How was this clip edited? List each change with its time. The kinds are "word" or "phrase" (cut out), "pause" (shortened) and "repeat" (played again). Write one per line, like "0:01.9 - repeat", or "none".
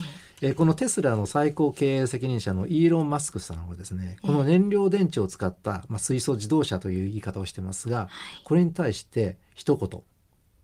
0:09.4 - pause